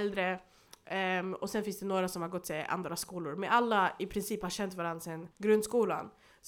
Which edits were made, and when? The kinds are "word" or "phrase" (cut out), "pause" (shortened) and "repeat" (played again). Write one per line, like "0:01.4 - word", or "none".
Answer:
0:05.3 - pause